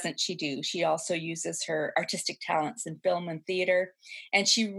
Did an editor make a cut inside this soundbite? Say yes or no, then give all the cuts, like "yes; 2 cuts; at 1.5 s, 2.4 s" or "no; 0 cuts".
no; 0 cuts